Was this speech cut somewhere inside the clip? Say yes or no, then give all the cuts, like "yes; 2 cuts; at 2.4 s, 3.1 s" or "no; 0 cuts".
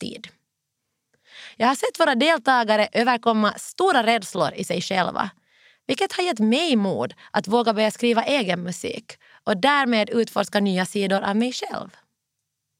no; 0 cuts